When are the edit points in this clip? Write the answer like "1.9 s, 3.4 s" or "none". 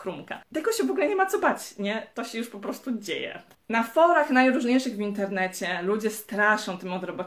3.5 s